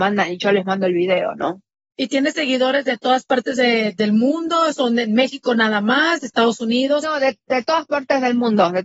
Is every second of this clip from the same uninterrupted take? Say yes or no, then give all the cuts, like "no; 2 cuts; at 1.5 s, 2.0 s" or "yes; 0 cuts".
yes; 0 cuts